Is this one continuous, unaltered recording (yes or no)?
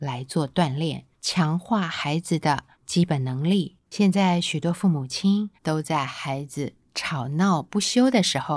no